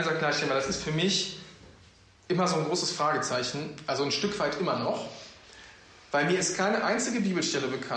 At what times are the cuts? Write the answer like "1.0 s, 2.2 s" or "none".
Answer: none